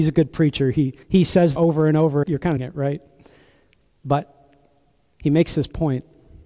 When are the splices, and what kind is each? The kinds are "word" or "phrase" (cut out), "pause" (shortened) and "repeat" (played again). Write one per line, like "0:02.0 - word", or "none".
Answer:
0:01.0 - pause
0:01.6 - phrase
0:02.2 - phrase
0:02.6 - phrase